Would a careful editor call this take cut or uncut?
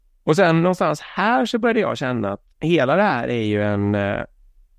cut